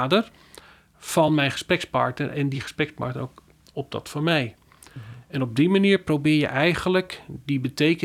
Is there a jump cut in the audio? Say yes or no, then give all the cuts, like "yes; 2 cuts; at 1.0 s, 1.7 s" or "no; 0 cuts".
no; 0 cuts